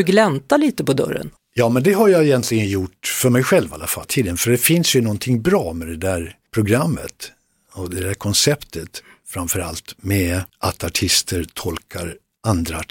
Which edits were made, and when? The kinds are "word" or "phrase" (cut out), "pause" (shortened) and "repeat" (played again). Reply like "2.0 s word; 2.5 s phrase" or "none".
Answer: 1.4 s pause; 4.0 s word; 6.5 s pause; 10.5 s pause